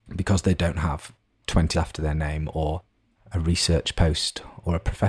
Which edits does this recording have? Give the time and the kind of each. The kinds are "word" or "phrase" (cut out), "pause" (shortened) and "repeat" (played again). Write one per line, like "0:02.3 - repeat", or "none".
0:01.7 - word